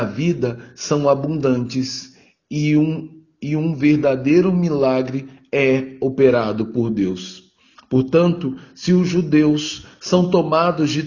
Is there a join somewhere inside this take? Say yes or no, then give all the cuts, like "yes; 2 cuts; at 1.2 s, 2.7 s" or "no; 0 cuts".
no; 0 cuts